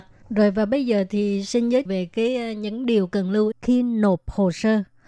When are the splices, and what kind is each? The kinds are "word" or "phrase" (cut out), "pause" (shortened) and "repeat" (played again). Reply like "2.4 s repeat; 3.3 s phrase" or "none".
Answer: 1.9 s word; 3.5 s word